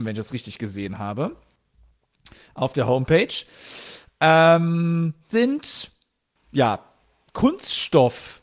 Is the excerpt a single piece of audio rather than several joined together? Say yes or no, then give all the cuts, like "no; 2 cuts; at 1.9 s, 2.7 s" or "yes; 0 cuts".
no; 1 cut; at 5.3 s